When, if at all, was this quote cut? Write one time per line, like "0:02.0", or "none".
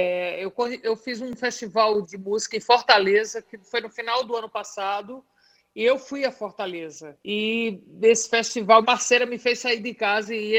0:02.0
0:07.2
0:08.8